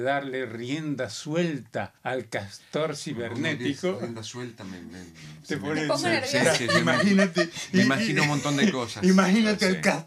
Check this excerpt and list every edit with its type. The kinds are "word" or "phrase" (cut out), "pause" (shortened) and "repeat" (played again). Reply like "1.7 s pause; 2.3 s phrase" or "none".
2.0 s pause